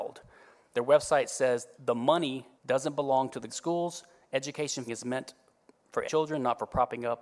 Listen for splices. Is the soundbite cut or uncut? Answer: cut